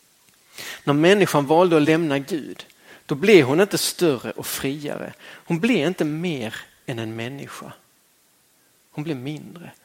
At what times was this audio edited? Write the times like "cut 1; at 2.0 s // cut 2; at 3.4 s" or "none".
none